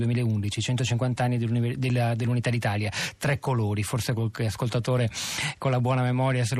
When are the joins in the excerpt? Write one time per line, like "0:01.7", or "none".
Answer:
none